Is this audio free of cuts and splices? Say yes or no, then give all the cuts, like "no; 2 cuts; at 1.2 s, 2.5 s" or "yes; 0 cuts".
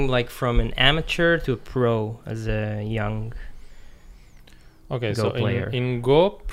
yes; 0 cuts